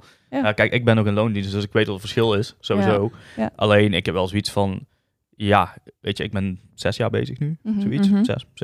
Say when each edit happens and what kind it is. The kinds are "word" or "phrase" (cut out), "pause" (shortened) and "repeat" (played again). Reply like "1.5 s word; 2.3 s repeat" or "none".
none